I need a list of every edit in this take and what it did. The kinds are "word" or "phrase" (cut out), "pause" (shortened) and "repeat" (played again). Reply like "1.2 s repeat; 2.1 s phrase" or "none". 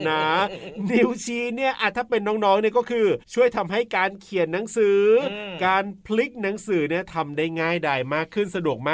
3.2 s pause